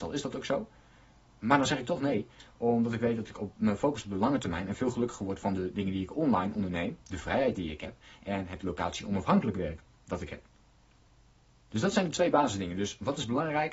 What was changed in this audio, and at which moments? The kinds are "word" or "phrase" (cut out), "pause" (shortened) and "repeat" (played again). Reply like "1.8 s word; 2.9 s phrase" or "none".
11.0 s pause